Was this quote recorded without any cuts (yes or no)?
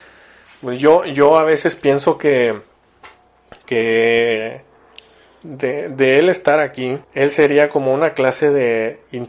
no